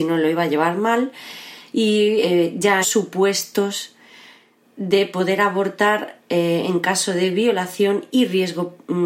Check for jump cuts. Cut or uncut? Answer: cut